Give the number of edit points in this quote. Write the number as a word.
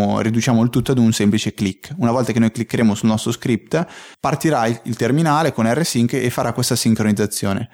one